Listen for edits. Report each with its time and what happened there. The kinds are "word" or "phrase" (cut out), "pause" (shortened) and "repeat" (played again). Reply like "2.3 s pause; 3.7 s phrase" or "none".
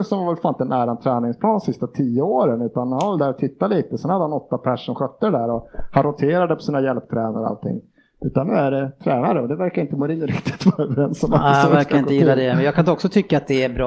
none